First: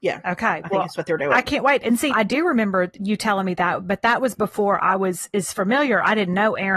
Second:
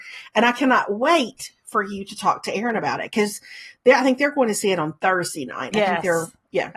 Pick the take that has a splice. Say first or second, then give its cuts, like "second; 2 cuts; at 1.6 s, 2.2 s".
first; 1 cut; at 2.1 s